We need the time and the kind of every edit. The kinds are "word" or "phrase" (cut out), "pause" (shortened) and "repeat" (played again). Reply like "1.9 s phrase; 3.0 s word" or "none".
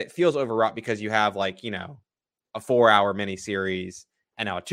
none